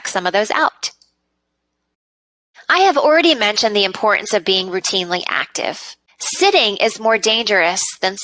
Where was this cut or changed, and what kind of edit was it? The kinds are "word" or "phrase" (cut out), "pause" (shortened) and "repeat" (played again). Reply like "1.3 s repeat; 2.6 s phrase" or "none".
6.1 s pause